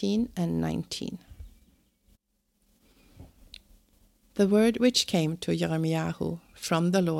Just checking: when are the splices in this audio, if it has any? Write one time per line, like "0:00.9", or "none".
none

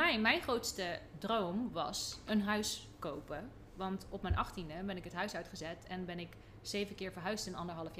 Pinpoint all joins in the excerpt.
none

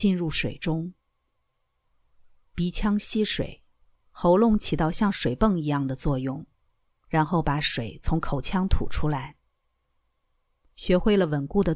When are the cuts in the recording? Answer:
none

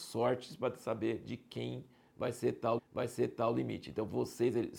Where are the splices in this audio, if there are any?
0:02.8

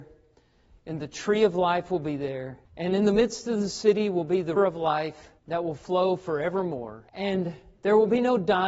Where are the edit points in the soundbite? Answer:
0:02.6
0:04.6
0:05.4
0:07.1

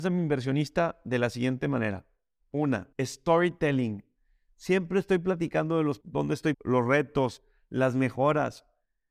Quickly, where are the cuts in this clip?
0:02.9
0:06.0
0:06.5

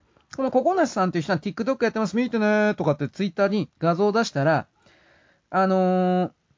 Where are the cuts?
none

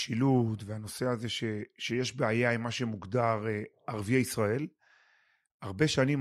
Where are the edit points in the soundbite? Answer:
none

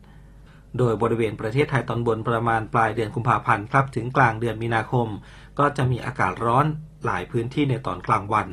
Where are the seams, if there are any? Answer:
none

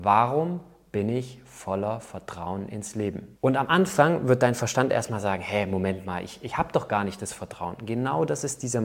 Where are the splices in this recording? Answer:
0:03.4

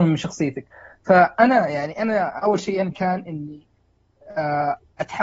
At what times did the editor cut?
0:02.9

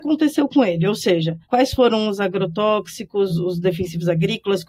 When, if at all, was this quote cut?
0:01.4
0:03.3

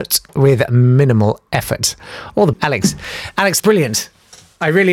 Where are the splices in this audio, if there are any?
0:02.5
0:03.6

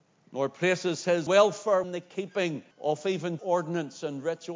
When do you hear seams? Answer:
0:01.3
0:01.8
0:02.7
0:03.4

